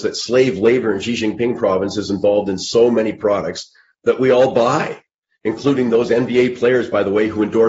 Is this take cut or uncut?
uncut